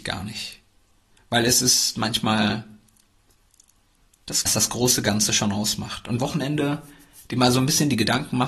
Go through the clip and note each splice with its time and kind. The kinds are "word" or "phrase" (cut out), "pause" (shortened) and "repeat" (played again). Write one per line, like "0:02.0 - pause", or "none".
0:04.5 - phrase
0:06.2 - phrase